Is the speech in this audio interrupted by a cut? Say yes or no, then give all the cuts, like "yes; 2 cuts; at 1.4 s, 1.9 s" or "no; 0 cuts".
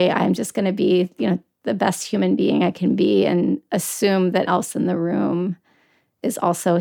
yes; 1 cut; at 4.5 s